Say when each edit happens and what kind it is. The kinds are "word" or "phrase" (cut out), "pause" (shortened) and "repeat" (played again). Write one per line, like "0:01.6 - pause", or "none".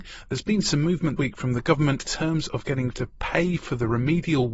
0:01.2 - word
0:02.0 - word
0:02.9 - word